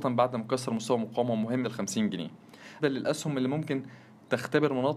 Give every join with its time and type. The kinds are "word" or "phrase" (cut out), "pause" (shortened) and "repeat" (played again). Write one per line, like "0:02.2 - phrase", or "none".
0:01.6 - word
0:02.8 - phrase